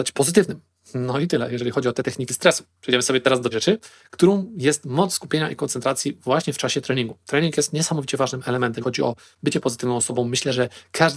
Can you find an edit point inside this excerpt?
yes; 3 cuts; at 2.3 s, 3.5 s, 8.8 s

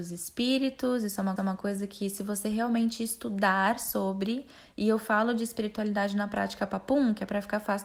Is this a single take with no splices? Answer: no; 1 cut; at 1.4 s

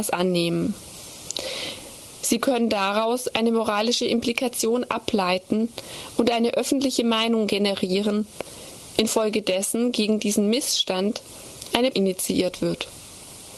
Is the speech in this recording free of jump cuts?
no; 1 cut; at 11.9 s

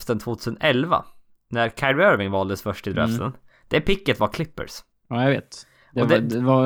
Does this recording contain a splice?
no; 0 cuts

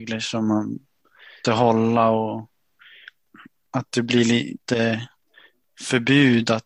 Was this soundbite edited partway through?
yes; 1 cut; at 1.4 s

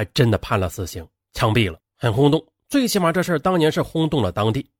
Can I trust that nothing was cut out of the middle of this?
no; 1 cut; at 1.9 s

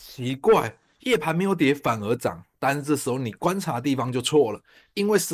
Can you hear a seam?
no; 0 cuts

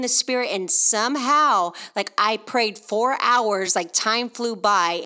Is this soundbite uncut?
yes; 0 cuts

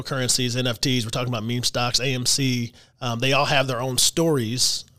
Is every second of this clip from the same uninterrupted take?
yes; 0 cuts

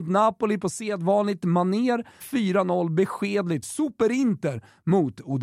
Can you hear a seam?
yes; 2 cuts; at 2.2 s, 3.6 s

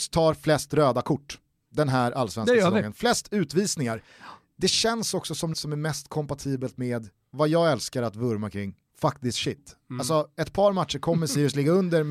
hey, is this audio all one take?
no; 1 cut; at 5.5 s

